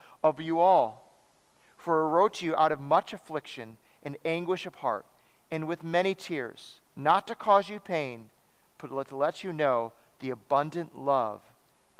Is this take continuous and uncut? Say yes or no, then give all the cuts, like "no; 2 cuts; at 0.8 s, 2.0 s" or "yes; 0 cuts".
no; 1 cut; at 6.9 s